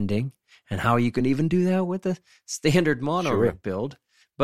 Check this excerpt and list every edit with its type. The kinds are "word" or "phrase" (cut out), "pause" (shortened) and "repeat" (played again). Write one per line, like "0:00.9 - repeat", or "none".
none